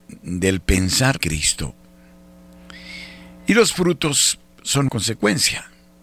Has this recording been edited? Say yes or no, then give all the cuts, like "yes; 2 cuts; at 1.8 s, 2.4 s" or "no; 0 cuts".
yes; 2 cuts; at 1.2 s, 4.9 s